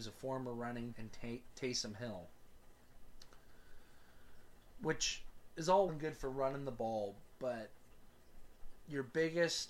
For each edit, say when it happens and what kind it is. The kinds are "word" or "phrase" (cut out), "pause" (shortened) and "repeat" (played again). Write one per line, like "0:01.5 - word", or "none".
0:00.9 - word
0:05.9 - word